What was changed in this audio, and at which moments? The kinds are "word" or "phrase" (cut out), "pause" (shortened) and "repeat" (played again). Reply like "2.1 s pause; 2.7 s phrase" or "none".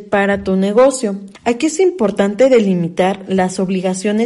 1.4 s pause